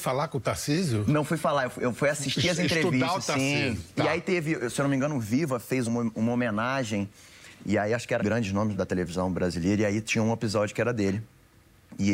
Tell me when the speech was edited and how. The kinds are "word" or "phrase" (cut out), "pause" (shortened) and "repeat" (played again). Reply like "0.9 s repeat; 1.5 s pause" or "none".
5.9 s word; 8.2 s word; 8.7 s word